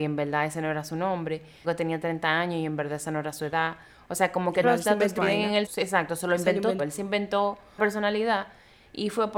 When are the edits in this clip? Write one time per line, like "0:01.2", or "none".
0:01.6
0:04.6
0:05.2
0:05.7
0:06.8
0:07.8

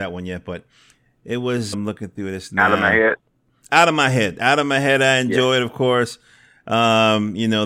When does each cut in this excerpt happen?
0:01.7

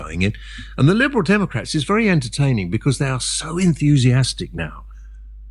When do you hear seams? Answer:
none

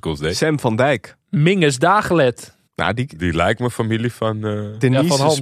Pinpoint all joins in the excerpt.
0:01.2
0:02.7

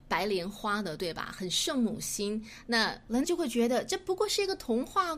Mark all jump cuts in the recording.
0:03.2

